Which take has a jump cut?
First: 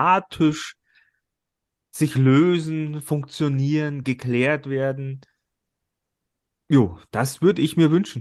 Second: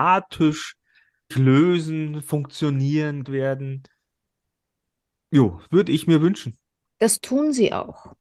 second; 3 cuts; at 1.3 s, 3.2 s, 5.7 s

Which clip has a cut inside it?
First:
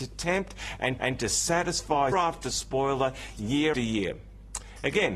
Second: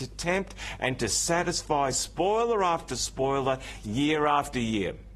first; 3 cuts; at 1.0 s, 2.1 s, 3.7 s

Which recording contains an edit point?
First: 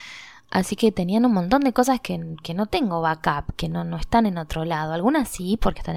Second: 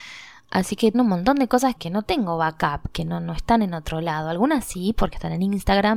second; 2 cuts; at 0.9 s, 1.8 s

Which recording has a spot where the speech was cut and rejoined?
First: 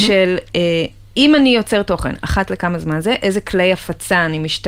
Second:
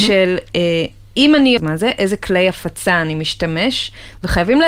second; 1 cut; at 1.6 s

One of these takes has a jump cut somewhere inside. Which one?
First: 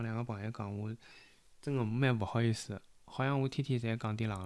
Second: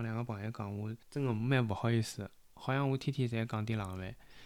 second; 1 cut; at 1.0 s

